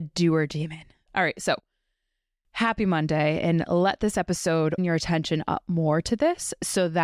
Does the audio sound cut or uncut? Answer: cut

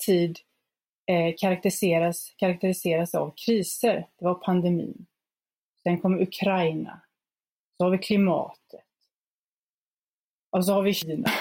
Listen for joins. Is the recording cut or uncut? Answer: uncut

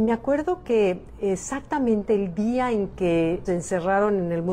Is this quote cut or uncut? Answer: cut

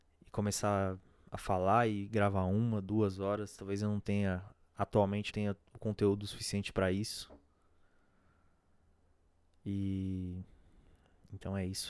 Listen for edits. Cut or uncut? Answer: cut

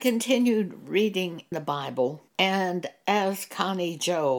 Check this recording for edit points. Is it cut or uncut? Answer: cut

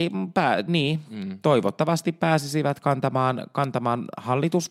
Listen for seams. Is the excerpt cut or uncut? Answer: uncut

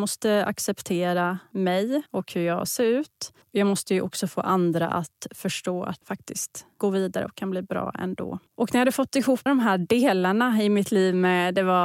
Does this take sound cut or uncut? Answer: cut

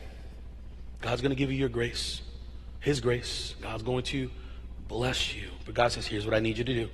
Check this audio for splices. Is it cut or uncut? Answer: uncut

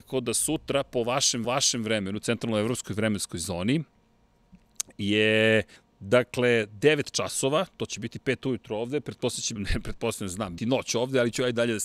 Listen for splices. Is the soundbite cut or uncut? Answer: cut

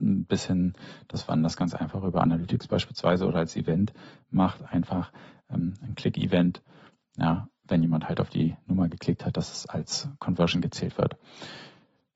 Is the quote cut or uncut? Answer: uncut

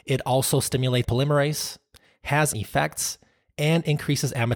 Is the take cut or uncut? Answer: cut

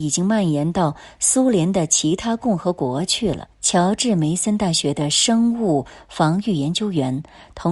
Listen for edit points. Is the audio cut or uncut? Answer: cut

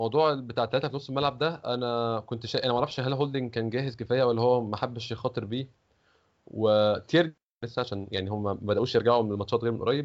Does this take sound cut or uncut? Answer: uncut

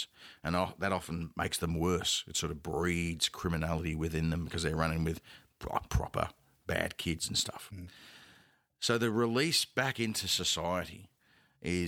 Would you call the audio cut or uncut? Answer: uncut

